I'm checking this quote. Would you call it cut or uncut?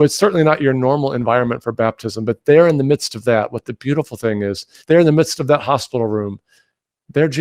cut